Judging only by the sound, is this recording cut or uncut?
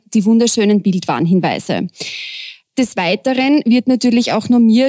uncut